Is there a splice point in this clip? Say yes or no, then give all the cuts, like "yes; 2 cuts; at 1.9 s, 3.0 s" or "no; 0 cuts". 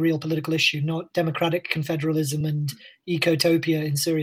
no; 0 cuts